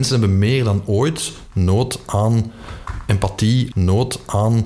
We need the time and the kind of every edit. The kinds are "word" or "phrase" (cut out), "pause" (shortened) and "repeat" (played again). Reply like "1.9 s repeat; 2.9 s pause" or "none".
3.7 s repeat